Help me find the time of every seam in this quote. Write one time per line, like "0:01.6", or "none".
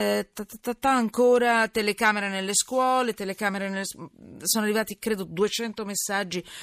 none